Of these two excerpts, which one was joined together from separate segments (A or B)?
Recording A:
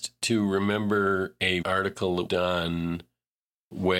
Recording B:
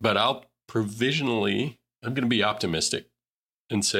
A